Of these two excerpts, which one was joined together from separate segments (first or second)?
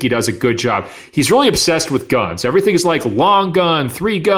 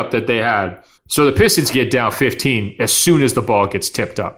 second